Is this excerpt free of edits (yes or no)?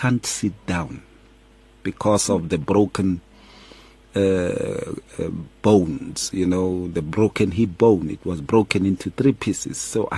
yes